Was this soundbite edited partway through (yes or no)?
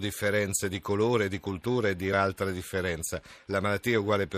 yes